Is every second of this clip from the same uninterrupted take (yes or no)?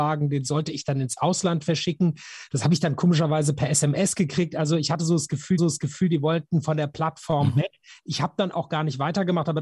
no